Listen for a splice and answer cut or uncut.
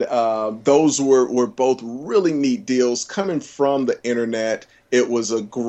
uncut